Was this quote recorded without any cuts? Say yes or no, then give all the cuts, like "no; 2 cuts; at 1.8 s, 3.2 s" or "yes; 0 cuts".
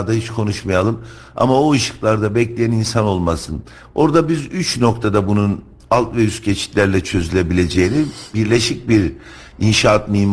yes; 0 cuts